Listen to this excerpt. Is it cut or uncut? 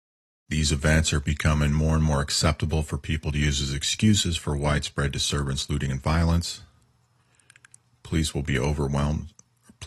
uncut